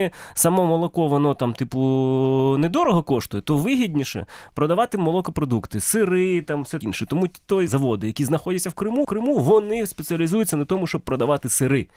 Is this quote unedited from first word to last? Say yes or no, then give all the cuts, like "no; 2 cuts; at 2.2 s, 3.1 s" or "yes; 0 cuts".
no; 3 cuts; at 6.8 s, 7.7 s, 9.0 s